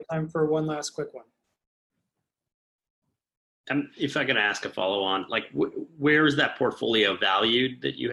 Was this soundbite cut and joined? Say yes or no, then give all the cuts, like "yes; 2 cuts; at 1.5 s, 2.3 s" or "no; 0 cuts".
no; 0 cuts